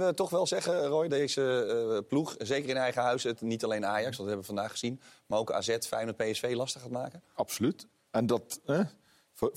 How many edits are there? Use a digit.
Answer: 2